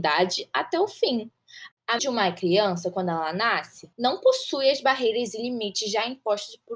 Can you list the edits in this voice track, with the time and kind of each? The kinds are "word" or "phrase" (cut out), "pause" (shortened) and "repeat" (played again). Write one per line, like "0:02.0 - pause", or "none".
0:02.0 - word
0:03.9 - pause